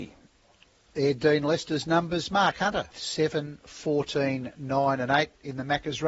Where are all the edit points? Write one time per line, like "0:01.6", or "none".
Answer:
0:02.9